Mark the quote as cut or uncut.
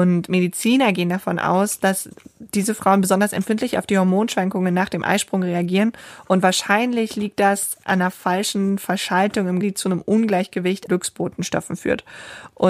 cut